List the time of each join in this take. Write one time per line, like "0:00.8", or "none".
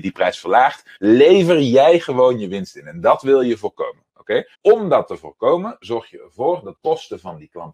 0:01.0
0:04.5
0:06.8